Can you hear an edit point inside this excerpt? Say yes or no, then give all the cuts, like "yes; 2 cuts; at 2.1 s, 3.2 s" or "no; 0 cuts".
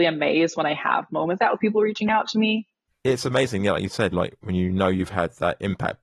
yes; 3 cuts; at 1.4 s, 2.9 s, 4.1 s